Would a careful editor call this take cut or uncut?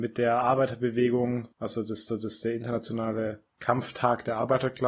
cut